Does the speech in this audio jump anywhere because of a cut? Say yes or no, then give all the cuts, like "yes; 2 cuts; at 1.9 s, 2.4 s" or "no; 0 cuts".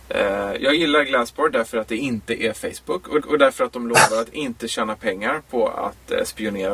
yes; 1 cut; at 3.2 s